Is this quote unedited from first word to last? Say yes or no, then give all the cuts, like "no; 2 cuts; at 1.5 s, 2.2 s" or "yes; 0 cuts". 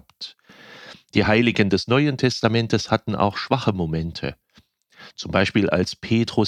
yes; 0 cuts